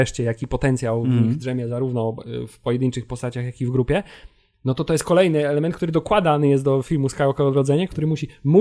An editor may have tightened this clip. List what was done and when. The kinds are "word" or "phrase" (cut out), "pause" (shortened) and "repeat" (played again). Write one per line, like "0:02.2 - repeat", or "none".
none